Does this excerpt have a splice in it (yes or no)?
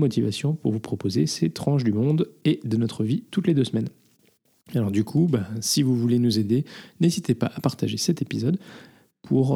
no